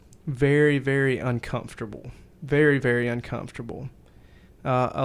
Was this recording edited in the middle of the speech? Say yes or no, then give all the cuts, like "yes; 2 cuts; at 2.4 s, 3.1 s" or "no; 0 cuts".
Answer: no; 0 cuts